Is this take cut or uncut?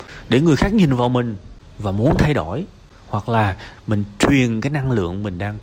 uncut